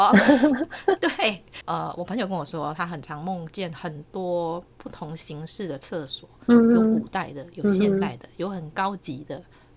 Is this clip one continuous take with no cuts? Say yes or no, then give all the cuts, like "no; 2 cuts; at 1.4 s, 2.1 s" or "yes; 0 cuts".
yes; 0 cuts